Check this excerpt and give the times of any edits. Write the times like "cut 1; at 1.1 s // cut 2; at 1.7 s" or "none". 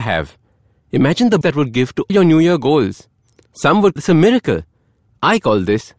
cut 1; at 1.4 s // cut 2; at 2.1 s // cut 3; at 4.0 s